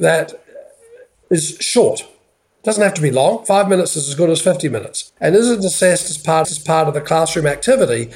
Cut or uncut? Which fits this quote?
cut